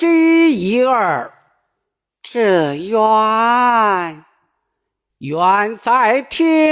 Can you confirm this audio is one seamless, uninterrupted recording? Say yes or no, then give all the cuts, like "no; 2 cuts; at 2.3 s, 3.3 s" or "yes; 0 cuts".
yes; 0 cuts